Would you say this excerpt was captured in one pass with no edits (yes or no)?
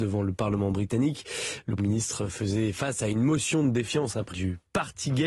no